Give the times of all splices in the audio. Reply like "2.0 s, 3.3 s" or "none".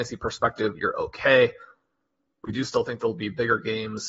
none